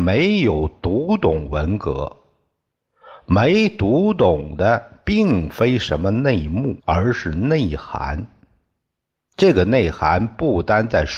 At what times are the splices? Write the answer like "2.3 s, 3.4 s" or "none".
6.8 s